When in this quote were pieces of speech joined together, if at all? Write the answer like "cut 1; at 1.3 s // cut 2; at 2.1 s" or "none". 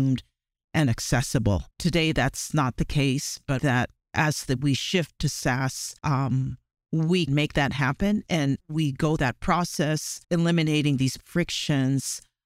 cut 1; at 1.7 s // cut 2; at 3.6 s // cut 3; at 6.0 s // cut 4; at 7.3 s // cut 5; at 8.6 s // cut 6; at 9.2 s // cut 7; at 10.2 s // cut 8; at 11.2 s